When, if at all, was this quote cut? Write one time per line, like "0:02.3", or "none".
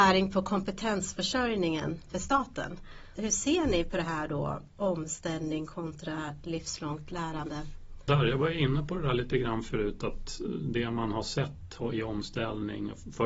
none